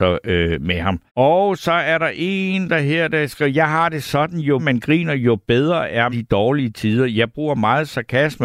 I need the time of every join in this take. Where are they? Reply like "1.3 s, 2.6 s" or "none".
1.1 s, 4.6 s, 6.1 s